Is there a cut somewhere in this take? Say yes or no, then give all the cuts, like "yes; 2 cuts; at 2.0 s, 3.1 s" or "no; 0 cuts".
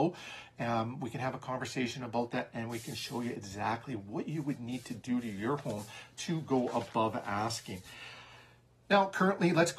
no; 0 cuts